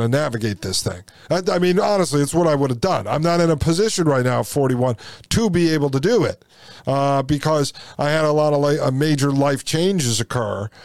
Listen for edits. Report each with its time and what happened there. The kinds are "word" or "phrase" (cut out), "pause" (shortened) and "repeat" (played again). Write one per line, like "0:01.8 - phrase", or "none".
0:06.8 - pause